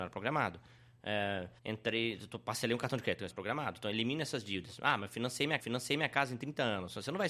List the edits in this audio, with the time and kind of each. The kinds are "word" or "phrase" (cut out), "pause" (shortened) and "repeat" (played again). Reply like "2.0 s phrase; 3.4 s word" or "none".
1.6 s pause; 3.3 s phrase; 5.6 s repeat